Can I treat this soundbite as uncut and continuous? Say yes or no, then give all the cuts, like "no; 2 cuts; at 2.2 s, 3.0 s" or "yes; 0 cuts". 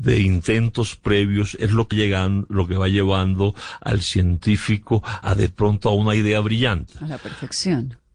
no; 2 cuts; at 1.9 s, 5.2 s